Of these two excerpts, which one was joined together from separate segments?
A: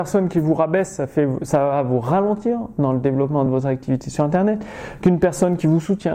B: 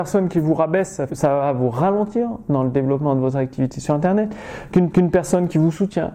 B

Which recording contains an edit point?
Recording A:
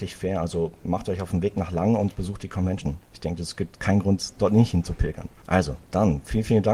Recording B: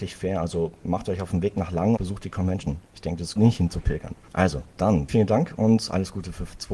B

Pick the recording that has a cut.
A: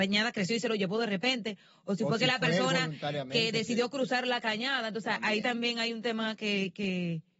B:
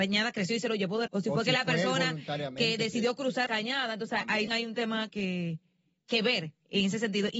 B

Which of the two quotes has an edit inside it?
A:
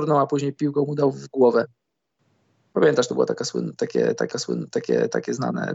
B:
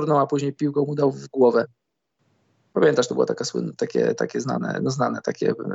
A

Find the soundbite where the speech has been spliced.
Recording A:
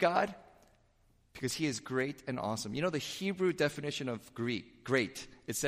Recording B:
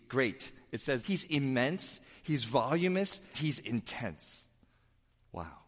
B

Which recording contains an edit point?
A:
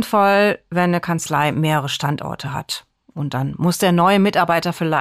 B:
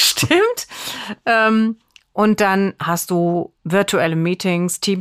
B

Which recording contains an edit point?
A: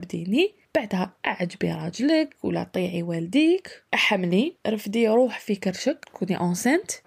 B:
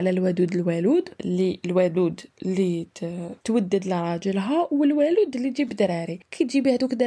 A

